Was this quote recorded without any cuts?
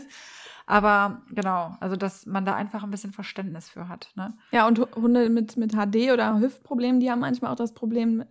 yes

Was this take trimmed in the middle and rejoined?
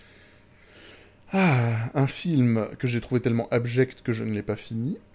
no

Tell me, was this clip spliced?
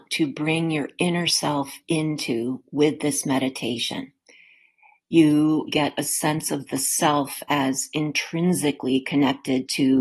yes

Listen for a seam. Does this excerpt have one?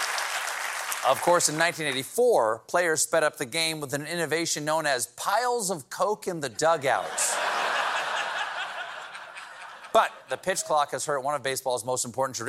no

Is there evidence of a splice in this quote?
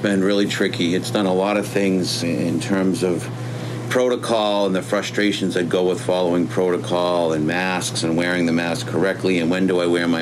yes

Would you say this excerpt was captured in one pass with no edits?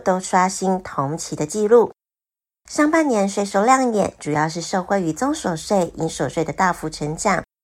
yes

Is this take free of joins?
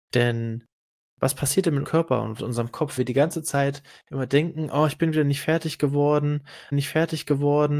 no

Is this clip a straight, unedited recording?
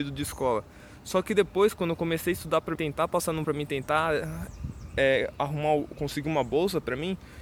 no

